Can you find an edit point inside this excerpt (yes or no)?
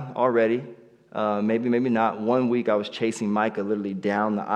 no